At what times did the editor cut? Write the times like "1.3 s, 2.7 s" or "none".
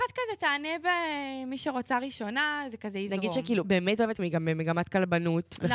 3.6 s, 4.2 s